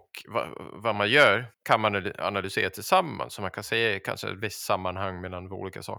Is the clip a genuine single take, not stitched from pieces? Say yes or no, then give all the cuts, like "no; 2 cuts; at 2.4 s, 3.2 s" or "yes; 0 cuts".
no; 1 cut; at 1.5 s